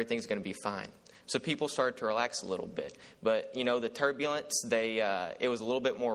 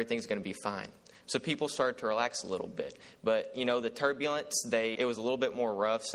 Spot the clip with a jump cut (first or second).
second